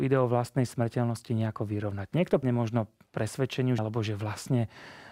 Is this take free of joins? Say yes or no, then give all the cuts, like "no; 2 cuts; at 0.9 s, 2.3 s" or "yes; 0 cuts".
no; 2 cuts; at 2.4 s, 3.8 s